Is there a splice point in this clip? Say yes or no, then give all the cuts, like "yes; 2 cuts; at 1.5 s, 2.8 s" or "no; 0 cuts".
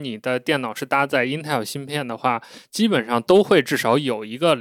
no; 0 cuts